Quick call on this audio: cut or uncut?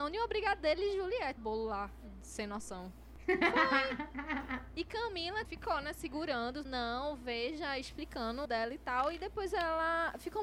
cut